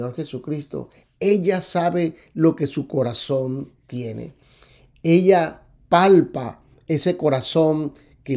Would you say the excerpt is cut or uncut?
uncut